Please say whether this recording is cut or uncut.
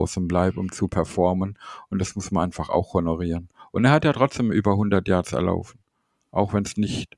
uncut